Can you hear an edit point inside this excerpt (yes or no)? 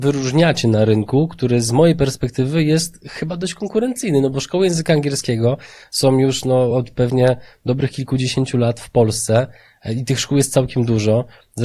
no